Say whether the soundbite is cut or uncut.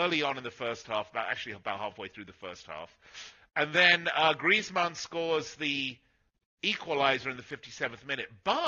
uncut